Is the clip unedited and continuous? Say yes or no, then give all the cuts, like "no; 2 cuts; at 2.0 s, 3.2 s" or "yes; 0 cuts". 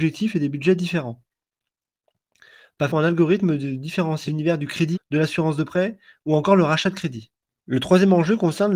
no; 3 cuts; at 2.9 s, 4.3 s, 4.9 s